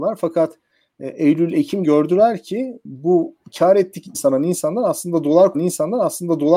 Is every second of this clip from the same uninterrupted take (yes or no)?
no